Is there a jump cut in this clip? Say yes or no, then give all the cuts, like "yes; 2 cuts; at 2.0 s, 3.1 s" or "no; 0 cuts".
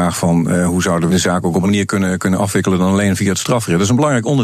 yes; 2 cuts; at 1.1 s, 1.6 s